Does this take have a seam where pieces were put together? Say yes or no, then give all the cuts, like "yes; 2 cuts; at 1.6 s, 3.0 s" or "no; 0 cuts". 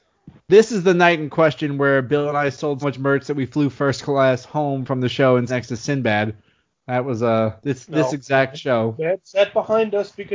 yes; 3 cuts; at 2.8 s, 5.5 s, 7.6 s